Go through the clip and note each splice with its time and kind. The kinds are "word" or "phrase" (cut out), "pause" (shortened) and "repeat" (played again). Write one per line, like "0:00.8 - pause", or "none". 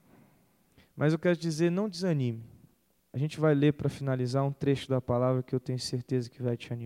none